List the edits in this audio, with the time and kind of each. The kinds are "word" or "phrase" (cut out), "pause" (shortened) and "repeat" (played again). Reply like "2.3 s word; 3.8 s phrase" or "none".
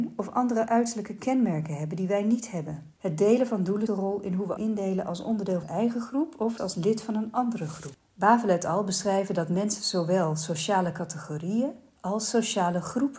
3.0 s pause; 3.9 s phrase; 4.6 s word; 5.6 s phrase; 6.6 s word; 8.0 s pause